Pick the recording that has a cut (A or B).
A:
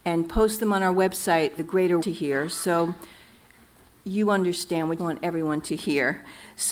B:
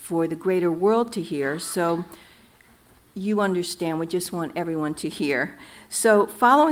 A